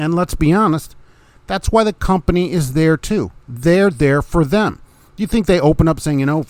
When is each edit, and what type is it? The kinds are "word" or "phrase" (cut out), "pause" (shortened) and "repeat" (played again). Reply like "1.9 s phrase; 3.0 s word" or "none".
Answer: none